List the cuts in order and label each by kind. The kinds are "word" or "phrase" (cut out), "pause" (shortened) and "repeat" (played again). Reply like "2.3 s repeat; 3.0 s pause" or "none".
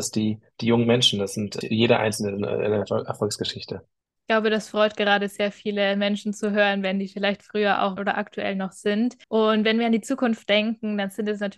1.6 s phrase; 4.1 s pause; 8.0 s phrase; 9.2 s pause